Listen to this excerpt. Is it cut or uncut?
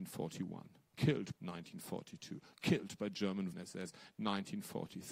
cut